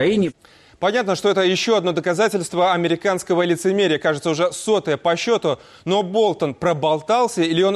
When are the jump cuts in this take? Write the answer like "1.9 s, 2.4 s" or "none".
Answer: none